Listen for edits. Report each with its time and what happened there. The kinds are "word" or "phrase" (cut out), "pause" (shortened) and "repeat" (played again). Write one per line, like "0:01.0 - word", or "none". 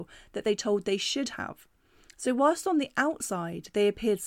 none